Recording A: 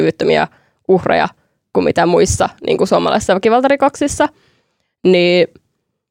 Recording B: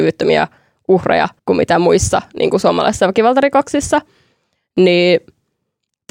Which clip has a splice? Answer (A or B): B